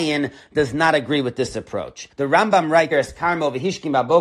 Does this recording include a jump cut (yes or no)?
yes